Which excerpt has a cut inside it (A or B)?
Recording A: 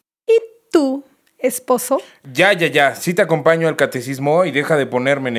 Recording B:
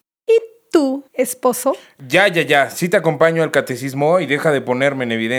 B